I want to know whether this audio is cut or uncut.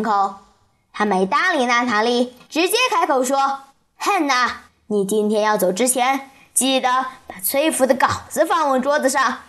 cut